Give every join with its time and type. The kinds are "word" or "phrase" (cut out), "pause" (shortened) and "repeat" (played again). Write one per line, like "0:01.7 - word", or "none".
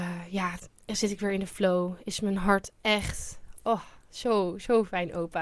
none